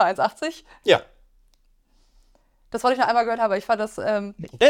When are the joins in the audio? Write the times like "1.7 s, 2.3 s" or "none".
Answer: none